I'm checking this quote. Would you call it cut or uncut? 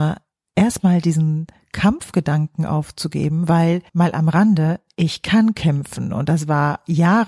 cut